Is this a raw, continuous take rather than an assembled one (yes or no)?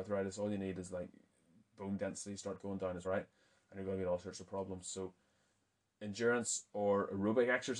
no